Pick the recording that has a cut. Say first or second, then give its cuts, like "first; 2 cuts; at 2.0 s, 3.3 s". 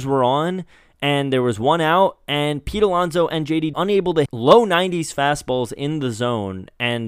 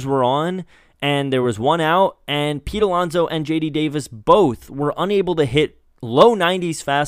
first; 2 cuts; at 3.7 s, 4.3 s